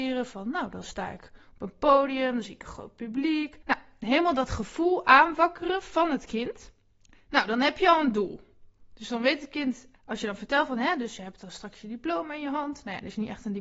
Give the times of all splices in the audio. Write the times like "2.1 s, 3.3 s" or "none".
3.6 s, 6.9 s, 10.0 s